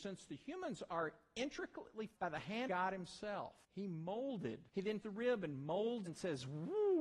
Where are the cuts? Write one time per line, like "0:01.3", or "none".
0:02.2
0:02.7
0:03.6
0:04.7
0:05.0
0:06.1